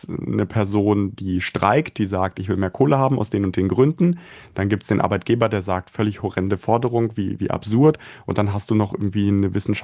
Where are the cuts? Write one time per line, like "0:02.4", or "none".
none